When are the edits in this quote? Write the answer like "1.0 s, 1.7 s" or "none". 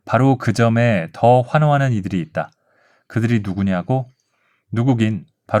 none